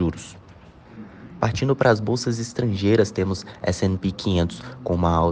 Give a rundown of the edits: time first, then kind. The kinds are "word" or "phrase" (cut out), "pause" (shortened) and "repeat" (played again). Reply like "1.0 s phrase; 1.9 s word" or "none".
none